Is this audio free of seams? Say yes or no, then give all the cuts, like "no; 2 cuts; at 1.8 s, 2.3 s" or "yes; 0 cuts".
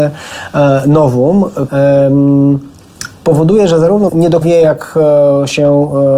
no; 3 cuts; at 1.7 s, 4.1 s, 4.4 s